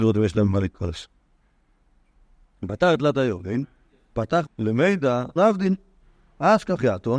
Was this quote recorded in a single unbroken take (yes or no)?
no